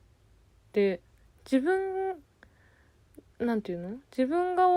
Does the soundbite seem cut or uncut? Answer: uncut